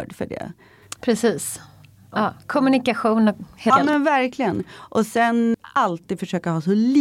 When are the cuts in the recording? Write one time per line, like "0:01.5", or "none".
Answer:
0:03.7
0:05.5